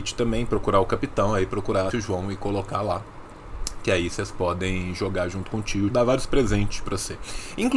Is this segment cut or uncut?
cut